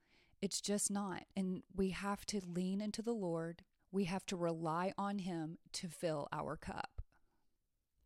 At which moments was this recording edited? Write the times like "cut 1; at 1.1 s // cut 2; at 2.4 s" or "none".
cut 1; at 1.3 s // cut 2; at 3.8 s